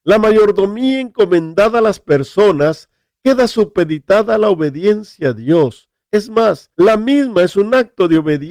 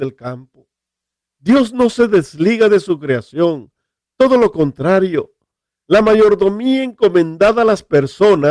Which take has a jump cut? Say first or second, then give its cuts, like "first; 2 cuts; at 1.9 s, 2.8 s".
first; 1 cut; at 6.7 s